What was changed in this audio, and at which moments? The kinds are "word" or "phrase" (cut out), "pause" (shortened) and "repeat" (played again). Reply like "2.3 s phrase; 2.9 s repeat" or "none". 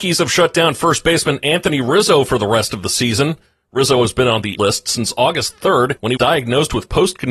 4.6 s word; 6.2 s word